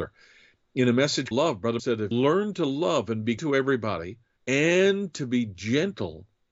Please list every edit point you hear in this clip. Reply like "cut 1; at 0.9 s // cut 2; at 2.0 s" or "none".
cut 1; at 1.3 s // cut 2; at 1.8 s // cut 3; at 2.1 s // cut 4; at 3.4 s // cut 5; at 4.4 s

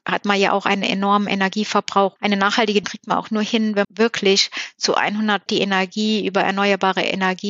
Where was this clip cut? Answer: cut 1; at 2.2 s // cut 2; at 2.8 s // cut 3; at 3.8 s // cut 4; at 5.5 s

